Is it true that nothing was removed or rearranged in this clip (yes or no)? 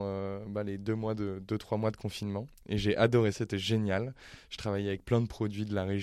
no